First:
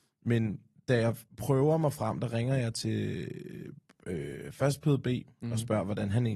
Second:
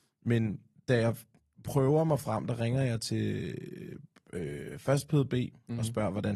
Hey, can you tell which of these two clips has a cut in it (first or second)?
first